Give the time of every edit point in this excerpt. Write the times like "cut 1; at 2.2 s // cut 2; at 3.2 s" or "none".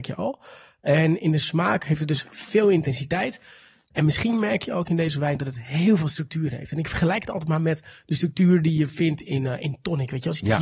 none